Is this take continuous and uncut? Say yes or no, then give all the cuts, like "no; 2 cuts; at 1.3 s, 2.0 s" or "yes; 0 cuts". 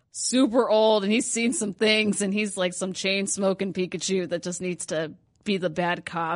yes; 0 cuts